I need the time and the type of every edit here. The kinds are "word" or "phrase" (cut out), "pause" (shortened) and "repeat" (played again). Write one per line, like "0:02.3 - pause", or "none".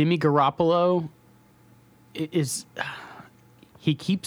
none